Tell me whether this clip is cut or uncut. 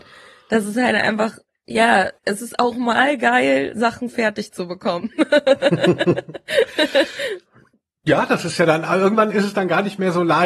cut